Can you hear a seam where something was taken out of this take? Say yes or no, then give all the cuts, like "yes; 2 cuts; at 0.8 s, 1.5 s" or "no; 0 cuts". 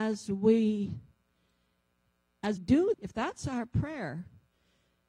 yes; 2 cuts; at 2.6 s, 2.9 s